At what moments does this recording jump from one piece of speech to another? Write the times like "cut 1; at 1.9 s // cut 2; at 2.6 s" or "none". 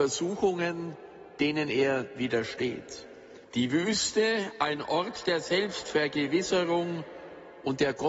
cut 1; at 3.4 s